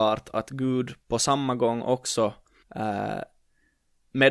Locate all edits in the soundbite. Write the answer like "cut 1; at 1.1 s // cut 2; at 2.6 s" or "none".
cut 1; at 2.6 s